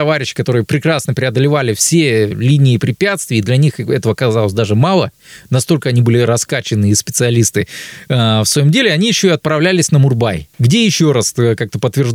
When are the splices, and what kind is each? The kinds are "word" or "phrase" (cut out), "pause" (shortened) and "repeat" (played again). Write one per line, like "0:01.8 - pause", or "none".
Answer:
0:10.5 - pause

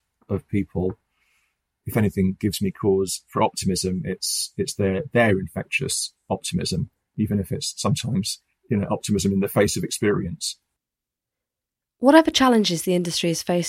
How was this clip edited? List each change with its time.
none

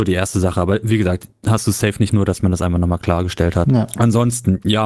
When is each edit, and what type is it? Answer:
0:02.1 - word

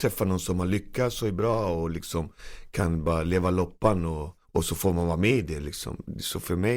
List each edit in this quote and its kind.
0:04.4 - pause

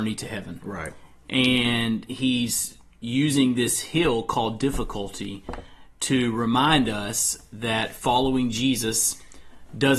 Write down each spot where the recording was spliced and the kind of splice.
none

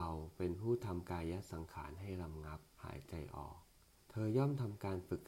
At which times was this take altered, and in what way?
0:02.7 - pause
0:04.0 - pause

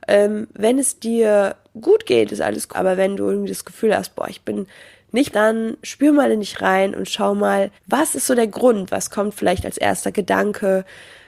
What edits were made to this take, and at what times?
0:02.7 - word
0:05.3 - phrase
0:07.8 - pause

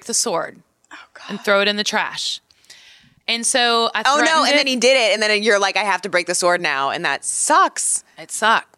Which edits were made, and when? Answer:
none

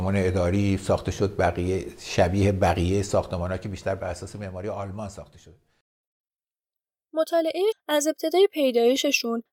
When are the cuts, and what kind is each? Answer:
0:07.7 - word

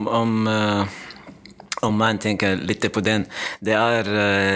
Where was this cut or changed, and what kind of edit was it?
none

